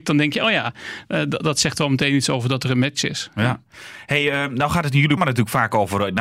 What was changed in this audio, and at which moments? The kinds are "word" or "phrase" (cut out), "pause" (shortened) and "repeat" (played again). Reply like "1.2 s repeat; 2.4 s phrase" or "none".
5.2 s word